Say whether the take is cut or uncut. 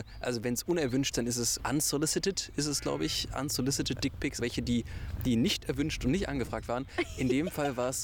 cut